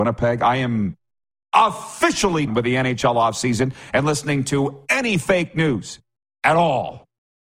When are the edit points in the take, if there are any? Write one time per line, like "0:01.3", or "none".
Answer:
0:02.5